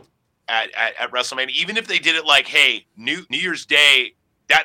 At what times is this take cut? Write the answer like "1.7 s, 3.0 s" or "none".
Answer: 3.3 s